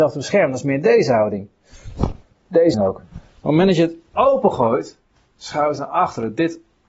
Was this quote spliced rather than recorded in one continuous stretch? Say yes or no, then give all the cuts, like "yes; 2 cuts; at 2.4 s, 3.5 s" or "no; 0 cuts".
yes; 2 cuts; at 2.7 s, 5.1 s